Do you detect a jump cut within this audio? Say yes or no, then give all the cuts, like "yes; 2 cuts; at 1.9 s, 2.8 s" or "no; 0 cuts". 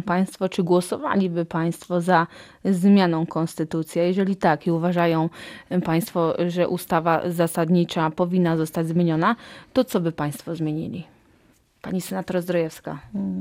yes; 1 cut; at 11.5 s